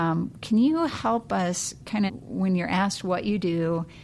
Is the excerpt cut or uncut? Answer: cut